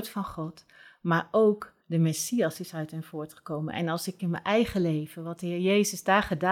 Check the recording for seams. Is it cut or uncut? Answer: cut